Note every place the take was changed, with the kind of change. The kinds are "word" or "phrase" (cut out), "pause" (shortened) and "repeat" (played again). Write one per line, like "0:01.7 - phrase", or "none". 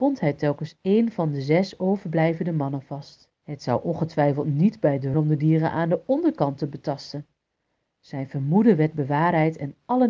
0:03.4 - pause
0:05.1 - phrase